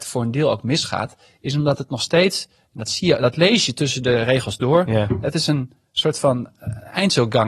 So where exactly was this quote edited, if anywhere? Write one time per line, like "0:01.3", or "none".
none